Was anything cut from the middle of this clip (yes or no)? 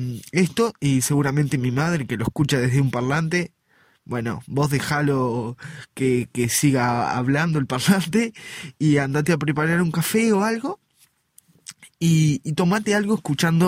no